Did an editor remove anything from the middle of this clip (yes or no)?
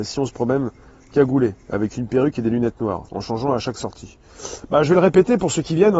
yes